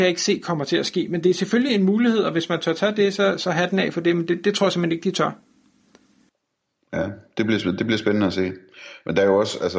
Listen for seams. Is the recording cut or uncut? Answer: uncut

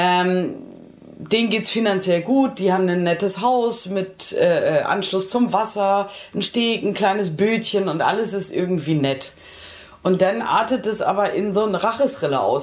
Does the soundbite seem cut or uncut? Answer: uncut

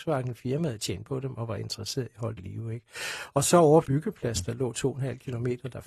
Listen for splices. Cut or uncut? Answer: cut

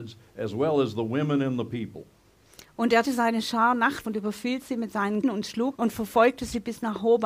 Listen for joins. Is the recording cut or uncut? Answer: cut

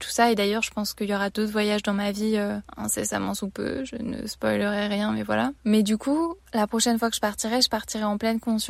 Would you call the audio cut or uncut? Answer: cut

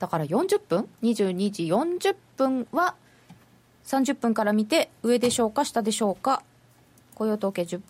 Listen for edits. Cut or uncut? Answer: uncut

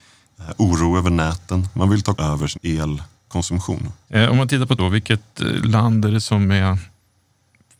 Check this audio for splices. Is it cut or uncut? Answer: cut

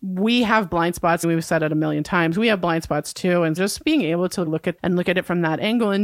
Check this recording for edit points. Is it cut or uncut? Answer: cut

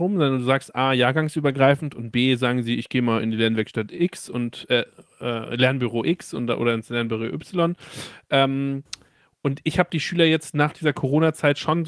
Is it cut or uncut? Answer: uncut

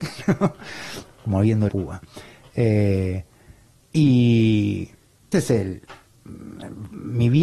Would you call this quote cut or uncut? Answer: cut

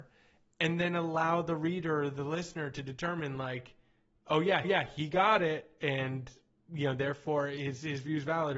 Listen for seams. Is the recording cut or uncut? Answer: cut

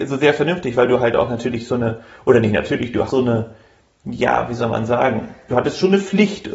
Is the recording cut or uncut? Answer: cut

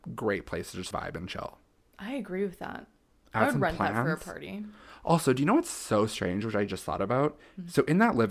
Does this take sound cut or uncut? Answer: cut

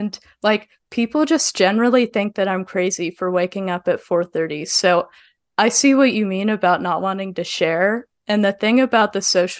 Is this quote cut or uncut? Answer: uncut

